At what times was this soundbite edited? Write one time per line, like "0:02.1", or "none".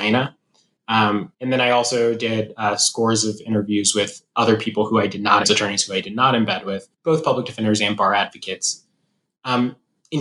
0:01.3
0:05.4
0:06.9

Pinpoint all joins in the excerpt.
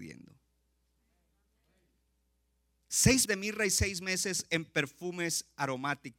0:03.2

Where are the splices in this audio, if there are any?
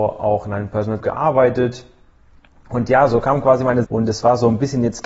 0:01.0
0:03.8

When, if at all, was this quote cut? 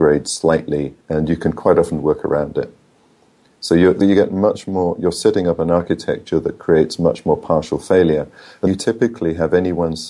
0:01.0
0:04.0
0:08.7

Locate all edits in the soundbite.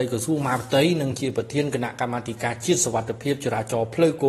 none

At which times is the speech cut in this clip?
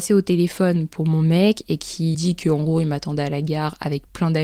0:02.1

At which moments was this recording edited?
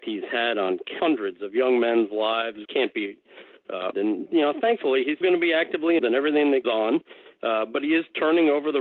0:01.0
0:02.6
0:03.9
0:05.2
0:06.0
0:06.6

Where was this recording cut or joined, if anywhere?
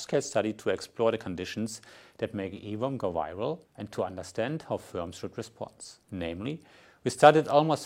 0:03.6
0:06.0

